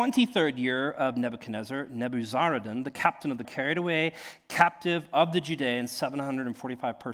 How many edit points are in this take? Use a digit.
1